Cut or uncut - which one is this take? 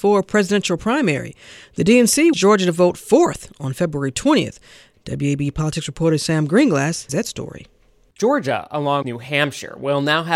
cut